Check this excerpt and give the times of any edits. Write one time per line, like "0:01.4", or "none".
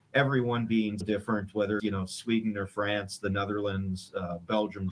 0:01.0
0:01.8